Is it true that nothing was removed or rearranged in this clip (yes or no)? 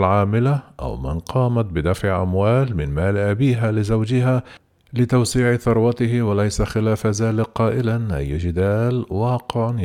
yes